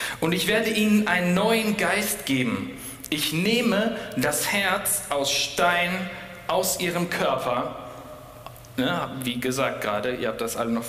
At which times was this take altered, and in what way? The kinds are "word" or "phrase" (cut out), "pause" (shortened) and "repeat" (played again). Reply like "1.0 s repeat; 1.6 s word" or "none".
none